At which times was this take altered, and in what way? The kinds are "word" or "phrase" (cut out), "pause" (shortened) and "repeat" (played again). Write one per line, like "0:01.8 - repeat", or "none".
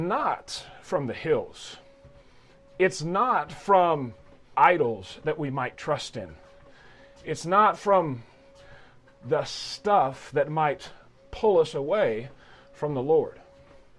0:04.5 - word